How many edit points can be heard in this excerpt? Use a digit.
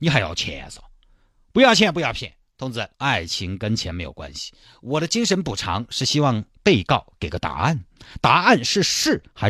1